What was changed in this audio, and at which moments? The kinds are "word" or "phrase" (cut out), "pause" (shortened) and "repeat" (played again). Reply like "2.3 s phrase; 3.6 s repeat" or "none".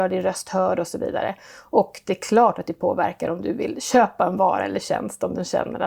none